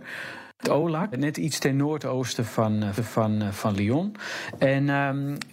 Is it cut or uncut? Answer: cut